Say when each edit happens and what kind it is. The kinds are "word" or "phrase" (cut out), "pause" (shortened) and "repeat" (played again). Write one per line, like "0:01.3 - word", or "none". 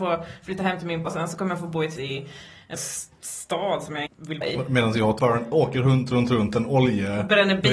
0:01.1 - word
0:02.0 - word
0:02.7 - word
0:04.1 - word
0:04.4 - word
0:05.2 - word